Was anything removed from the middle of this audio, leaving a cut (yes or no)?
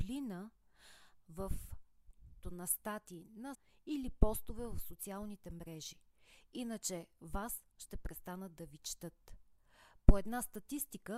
yes